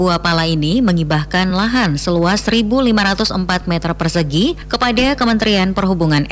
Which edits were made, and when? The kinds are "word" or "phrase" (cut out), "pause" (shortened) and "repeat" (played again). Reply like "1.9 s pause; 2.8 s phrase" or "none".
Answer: none